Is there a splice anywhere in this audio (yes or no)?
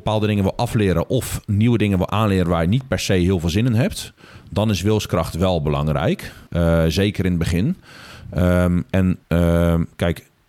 yes